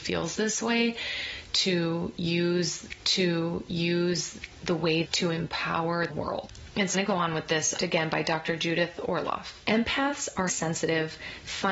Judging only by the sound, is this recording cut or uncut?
cut